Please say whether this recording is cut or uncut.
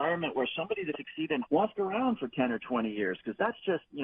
cut